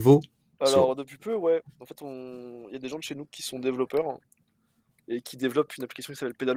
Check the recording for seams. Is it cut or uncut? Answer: uncut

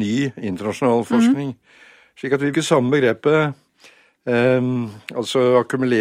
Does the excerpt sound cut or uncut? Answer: cut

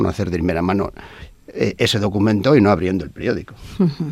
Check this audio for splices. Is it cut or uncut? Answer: uncut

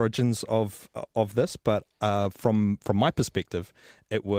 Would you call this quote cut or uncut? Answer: cut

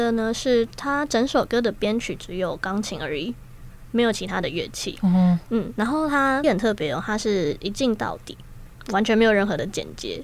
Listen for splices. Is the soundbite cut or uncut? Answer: cut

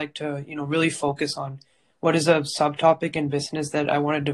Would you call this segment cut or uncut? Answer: uncut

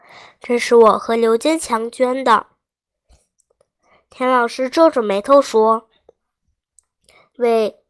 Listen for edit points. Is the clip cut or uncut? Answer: uncut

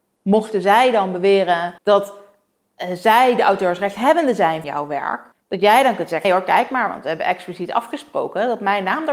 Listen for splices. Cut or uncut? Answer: cut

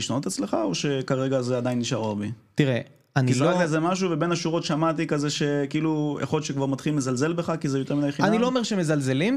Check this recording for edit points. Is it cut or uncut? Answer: uncut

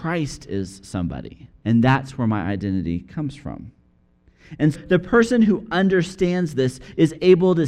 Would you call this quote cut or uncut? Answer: cut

